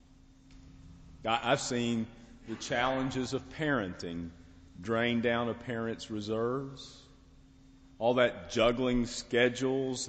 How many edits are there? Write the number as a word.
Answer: zero